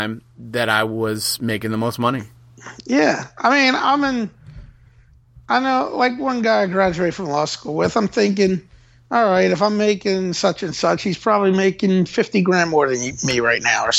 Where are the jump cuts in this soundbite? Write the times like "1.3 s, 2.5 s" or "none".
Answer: none